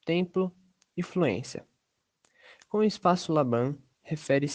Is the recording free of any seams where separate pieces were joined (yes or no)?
yes